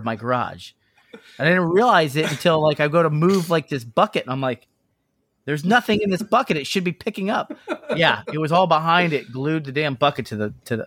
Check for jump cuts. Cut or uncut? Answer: uncut